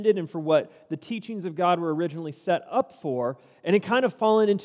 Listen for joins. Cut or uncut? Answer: uncut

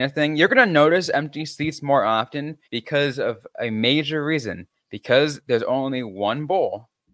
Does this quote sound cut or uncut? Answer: cut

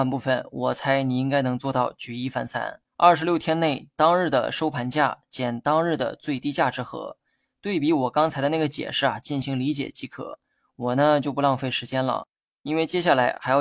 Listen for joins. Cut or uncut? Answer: cut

